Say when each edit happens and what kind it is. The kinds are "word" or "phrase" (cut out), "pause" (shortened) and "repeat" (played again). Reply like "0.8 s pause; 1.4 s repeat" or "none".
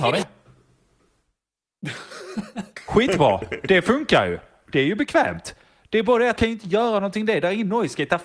6.4 s word